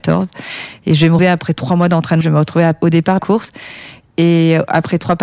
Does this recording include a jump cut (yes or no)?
yes